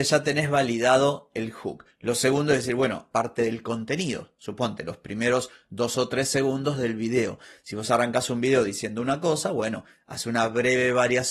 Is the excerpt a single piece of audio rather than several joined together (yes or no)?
no